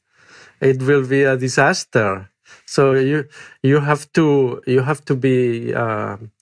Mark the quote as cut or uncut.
uncut